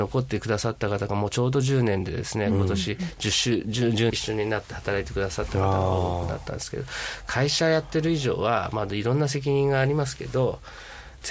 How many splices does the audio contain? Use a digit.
1